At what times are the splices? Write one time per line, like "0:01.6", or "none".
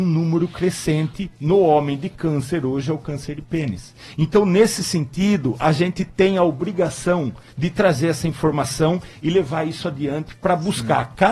none